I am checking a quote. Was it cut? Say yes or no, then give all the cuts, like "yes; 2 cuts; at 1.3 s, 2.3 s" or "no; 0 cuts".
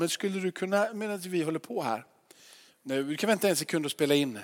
no; 0 cuts